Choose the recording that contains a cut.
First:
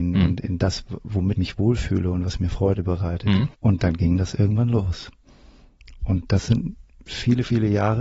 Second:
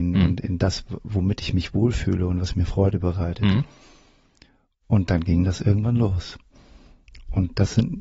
first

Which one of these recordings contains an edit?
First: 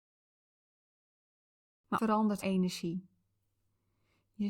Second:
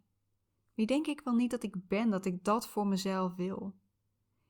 first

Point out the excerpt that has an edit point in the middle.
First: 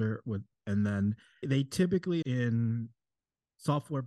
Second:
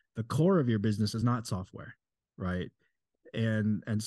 first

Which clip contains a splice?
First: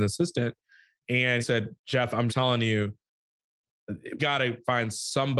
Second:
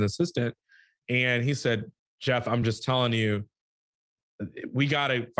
first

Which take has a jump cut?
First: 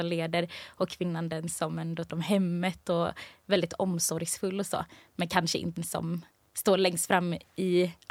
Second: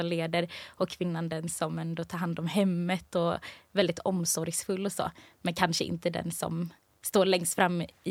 first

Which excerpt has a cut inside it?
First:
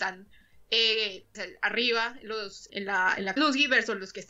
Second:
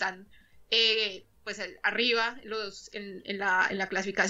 first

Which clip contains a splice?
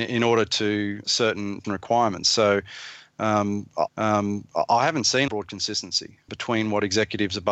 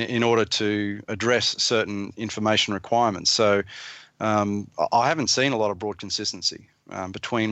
first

